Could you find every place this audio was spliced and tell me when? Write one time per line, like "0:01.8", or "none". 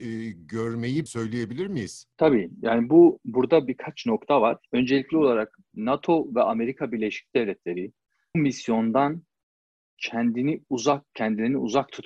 0:01.1
0:04.7
0:08.3